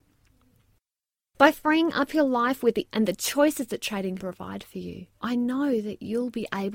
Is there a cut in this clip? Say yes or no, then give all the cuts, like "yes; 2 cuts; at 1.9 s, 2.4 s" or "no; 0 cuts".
yes; 3 cuts; at 2.9 s, 4.2 s, 5.1 s